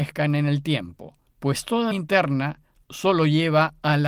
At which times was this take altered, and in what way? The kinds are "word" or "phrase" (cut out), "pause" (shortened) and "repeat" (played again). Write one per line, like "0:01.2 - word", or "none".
0:01.3 - pause
0:01.9 - word